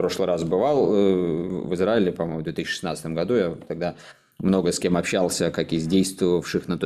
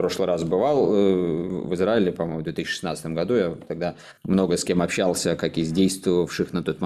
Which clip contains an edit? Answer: second; 1 cut; at 4.2 s

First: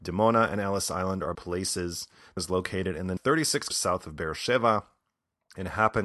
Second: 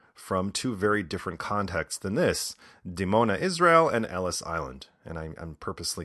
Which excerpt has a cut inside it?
first; 4 cuts; at 1.3 s, 2.4 s, 3.2 s, 3.7 s

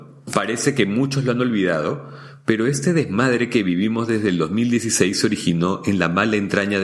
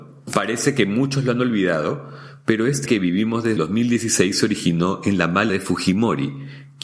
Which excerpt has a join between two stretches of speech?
second; 3 cuts; at 2.9 s, 3.6 s, 5.5 s

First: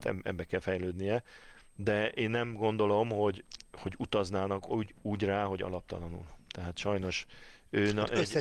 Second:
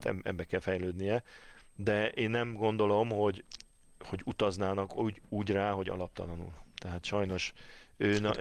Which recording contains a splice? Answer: first; 1 cut; at 3.7 s

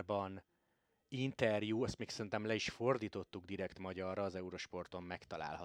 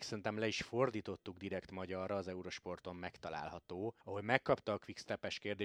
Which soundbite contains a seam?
second; 1 cut; at 4.0 s

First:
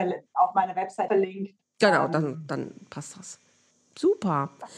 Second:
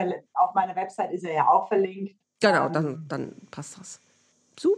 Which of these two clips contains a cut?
first; 1 cut; at 1.1 s

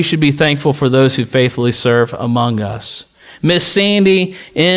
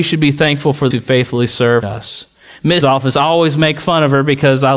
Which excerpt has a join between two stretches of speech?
second; 3 cuts; at 0.9 s, 1.8 s, 2.8 s

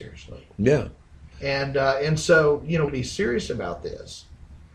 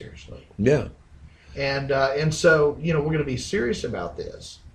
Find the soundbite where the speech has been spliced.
first; 2 cuts; at 1.3 s, 2.9 s

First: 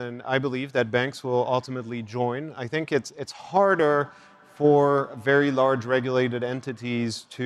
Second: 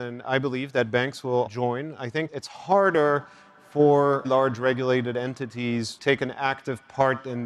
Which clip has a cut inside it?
second; 4 cuts; at 1.5 s, 2.3 s, 4.2 s, 6.0 s

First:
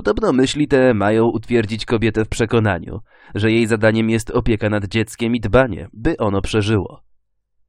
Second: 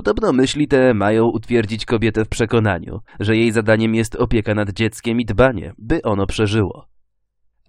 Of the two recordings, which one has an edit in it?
second; 1 cut; at 3.1 s

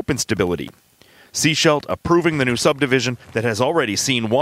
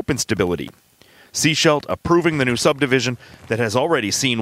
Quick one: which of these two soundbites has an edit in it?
first; 1 cut; at 3.2 s

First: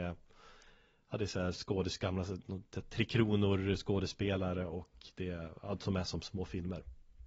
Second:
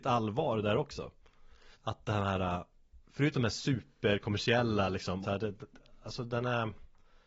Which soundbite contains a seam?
second; 3 cuts; at 1.7 s, 3.0 s, 5.2 s

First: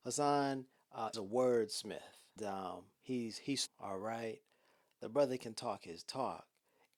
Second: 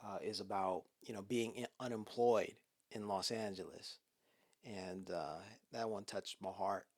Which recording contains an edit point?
first; 4 cuts; at 1.1 s, 2.4 s, 2.9 s, 3.7 s

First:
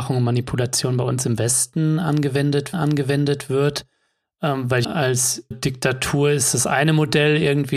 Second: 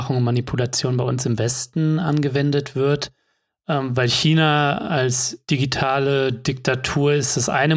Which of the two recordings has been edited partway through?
first; 3 cuts; at 2.7 s, 4.8 s, 5.5 s

